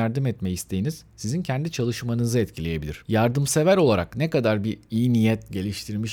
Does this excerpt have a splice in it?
no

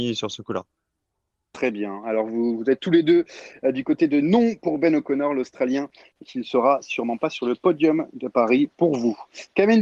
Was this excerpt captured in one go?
yes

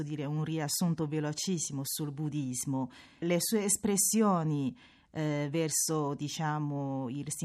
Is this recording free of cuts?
yes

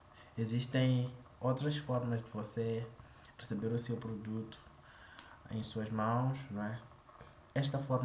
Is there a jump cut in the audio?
no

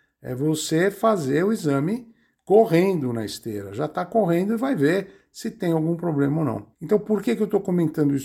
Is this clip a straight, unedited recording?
no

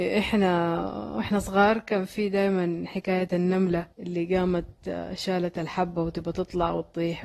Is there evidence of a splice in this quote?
yes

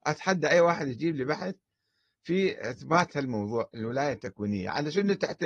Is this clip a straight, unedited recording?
yes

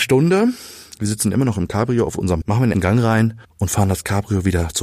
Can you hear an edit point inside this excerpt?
yes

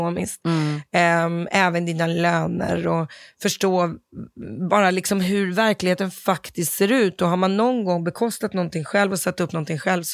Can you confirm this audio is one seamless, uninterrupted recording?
yes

